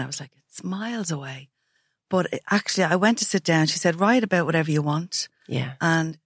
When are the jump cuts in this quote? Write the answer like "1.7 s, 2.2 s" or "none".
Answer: none